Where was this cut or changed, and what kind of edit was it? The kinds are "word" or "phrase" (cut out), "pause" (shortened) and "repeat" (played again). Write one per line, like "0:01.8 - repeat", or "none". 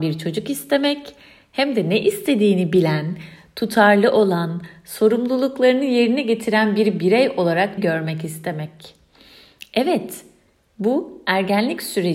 0:07.8 - word